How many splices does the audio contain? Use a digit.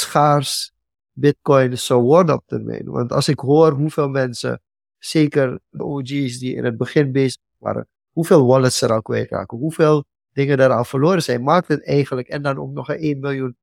0